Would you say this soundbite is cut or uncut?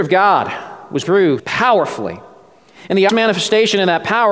cut